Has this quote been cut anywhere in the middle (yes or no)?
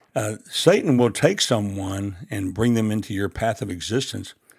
no